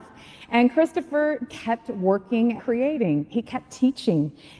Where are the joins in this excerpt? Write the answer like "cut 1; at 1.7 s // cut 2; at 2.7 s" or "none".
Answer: cut 1; at 1.5 s // cut 2; at 2.6 s

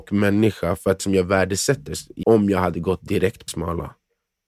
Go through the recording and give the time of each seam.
cut 1; at 1.0 s // cut 2; at 2.2 s // cut 3; at 3.5 s

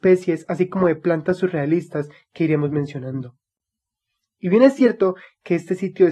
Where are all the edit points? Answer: none

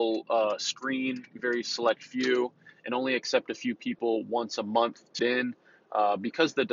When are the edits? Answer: cut 1; at 1.4 s // cut 2; at 5.2 s

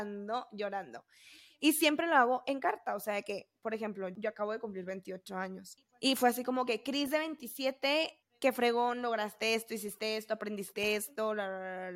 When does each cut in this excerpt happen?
none

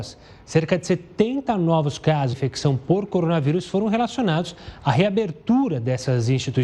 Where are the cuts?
cut 1; at 2.3 s

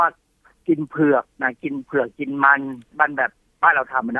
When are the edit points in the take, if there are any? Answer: cut 1; at 1.3 s

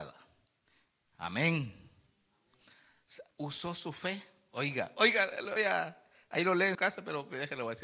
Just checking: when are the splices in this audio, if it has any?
cut 1; at 3.3 s // cut 2; at 5.6 s // cut 3; at 6.7 s

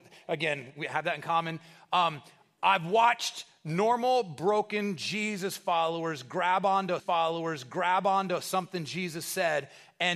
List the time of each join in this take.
cut 1; at 7.0 s

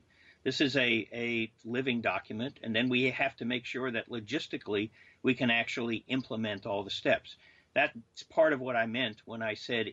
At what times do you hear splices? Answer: none

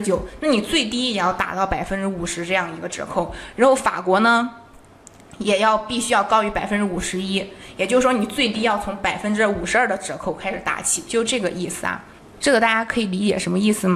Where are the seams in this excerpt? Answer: cut 1; at 12.2 s

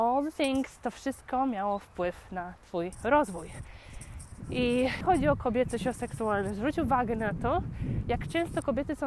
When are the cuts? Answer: cut 1; at 5.0 s

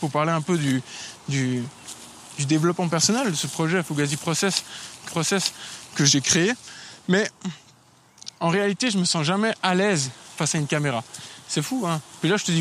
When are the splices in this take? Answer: cut 1; at 5.1 s

